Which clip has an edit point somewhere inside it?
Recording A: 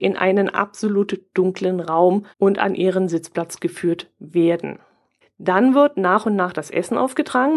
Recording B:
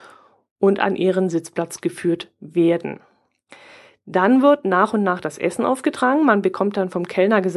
A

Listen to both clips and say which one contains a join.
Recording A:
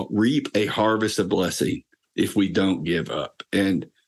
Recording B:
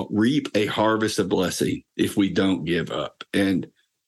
B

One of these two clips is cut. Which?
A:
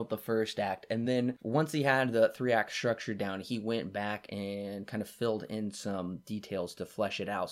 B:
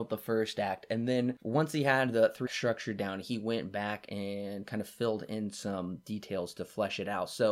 B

